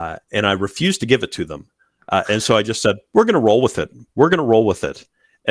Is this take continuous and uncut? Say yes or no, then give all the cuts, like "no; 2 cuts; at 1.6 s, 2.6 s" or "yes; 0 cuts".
yes; 0 cuts